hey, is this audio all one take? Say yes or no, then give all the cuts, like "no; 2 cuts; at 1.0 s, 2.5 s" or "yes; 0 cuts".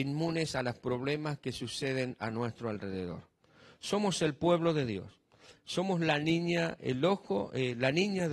yes; 0 cuts